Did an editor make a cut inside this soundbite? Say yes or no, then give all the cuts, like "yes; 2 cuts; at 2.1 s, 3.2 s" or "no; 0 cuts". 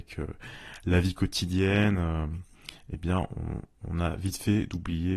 no; 0 cuts